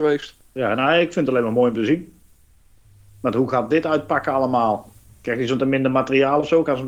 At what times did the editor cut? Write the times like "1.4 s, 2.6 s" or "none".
none